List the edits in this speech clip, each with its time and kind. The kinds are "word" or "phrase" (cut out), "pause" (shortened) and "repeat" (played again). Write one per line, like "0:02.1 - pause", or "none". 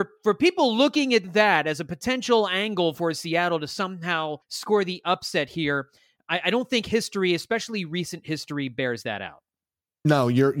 0:04.4 - pause